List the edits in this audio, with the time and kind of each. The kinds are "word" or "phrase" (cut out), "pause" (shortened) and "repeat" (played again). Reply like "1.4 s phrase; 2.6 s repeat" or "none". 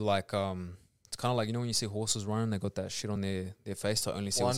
none

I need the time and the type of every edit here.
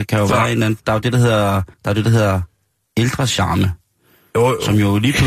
1.7 s pause

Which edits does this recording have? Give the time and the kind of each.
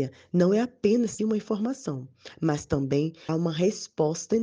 1.2 s word; 3.3 s word

